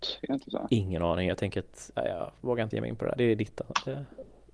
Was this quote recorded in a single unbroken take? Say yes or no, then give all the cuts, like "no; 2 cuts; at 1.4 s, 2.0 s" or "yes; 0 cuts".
no; 1 cut; at 2.7 s